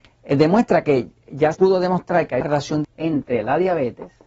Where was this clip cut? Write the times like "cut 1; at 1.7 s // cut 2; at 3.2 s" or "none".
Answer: cut 1; at 1.5 s // cut 2; at 2.4 s // cut 3; at 2.8 s